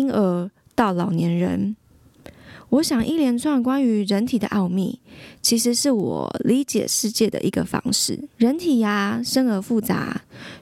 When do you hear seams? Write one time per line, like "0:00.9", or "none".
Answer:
0:08.3